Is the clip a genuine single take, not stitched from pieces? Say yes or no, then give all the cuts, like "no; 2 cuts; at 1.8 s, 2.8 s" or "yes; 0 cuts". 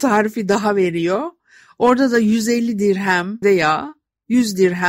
no; 1 cut; at 3.4 s